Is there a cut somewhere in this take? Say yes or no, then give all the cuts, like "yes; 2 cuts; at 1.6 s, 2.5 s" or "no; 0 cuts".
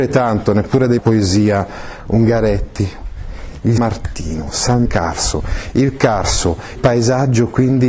yes; 4 cuts; at 1.0 s, 3.8 s, 4.9 s, 6.8 s